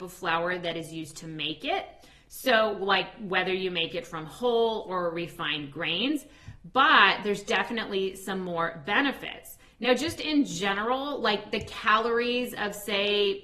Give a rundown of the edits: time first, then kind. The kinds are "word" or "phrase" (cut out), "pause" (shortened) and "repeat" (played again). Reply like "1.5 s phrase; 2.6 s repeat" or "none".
none